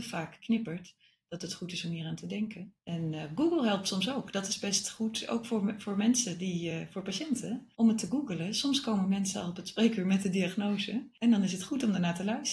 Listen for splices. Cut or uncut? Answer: uncut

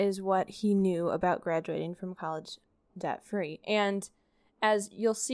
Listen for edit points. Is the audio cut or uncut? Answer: uncut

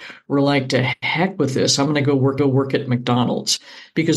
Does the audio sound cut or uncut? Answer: cut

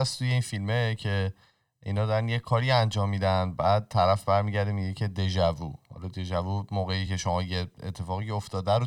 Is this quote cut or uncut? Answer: uncut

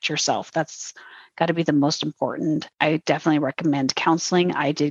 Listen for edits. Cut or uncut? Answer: uncut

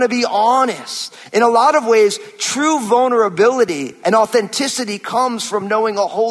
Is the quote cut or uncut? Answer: uncut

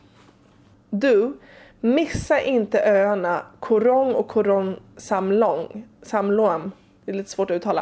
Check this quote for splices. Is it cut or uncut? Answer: uncut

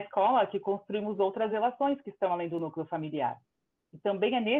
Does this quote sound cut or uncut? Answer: uncut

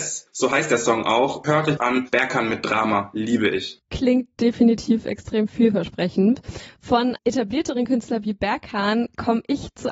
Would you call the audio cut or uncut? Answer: cut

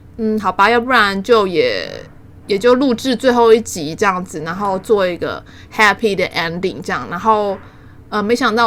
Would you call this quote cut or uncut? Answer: uncut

